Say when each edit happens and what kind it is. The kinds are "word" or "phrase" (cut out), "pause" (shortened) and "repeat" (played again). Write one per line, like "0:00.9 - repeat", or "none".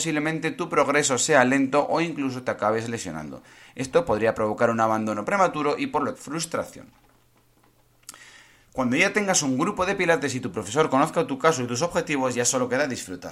0:06.1 - word